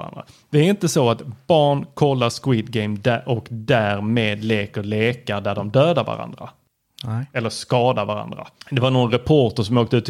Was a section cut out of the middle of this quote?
yes; 1 cut; at 8.6 s

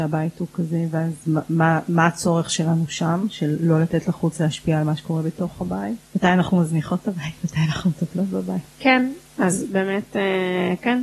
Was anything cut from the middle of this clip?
yes; 2 cuts; at 6.0 s, 8.7 s

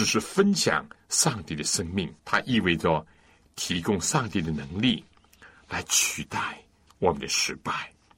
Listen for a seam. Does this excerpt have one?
yes; 1 cut; at 2.2 s

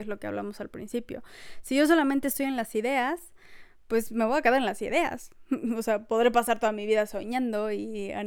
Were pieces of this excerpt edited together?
no; 0 cuts

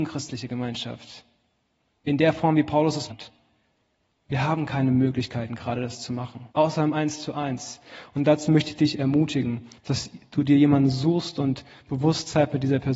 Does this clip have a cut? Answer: yes; 3 cuts; at 3.1 s, 6.5 s, 9.8 s

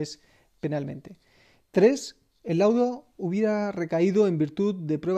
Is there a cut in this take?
no; 0 cuts

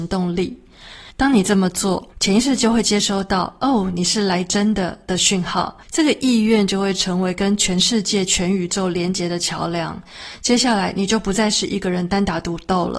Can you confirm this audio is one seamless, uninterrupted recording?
no; 3 cuts; at 1.1 s, 2.1 s, 5.8 s

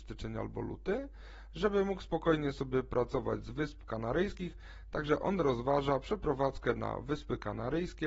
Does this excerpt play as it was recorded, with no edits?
yes; 0 cuts

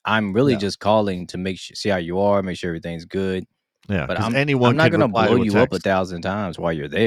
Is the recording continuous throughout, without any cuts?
yes; 0 cuts

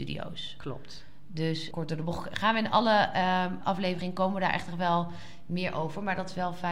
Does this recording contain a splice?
yes; 2 cuts; at 1.7 s, 3.6 s

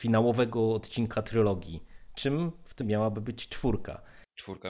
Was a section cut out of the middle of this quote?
yes; 1 cut; at 2.8 s

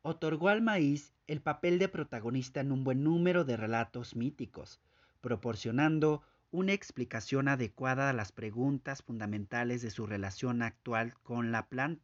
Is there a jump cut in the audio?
no; 0 cuts

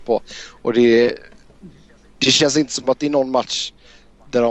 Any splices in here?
no; 0 cuts

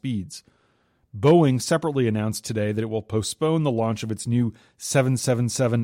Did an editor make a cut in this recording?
no; 0 cuts

